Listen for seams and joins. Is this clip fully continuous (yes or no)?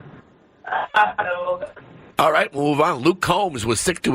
yes